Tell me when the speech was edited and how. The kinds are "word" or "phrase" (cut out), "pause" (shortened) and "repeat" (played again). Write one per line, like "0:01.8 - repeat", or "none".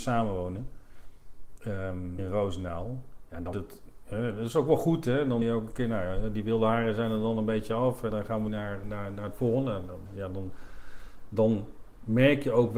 0:02.2 - word
0:03.5 - word
0:05.4 - word
0:08.1 - word
0:08.5 - word
0:08.8 - word
0:10.1 - word